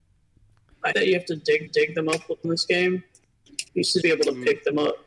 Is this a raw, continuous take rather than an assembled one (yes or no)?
no